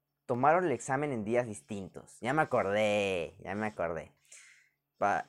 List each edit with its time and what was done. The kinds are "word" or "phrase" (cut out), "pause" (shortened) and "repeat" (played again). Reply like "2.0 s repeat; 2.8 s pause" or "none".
none